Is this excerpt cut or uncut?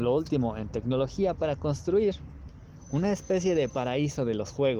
uncut